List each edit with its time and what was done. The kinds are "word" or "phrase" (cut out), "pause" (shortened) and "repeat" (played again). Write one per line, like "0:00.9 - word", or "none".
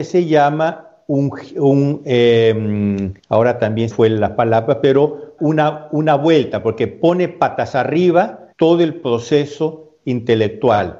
0:03.2 - pause
0:03.9 - phrase
0:05.4 - word
0:08.5 - pause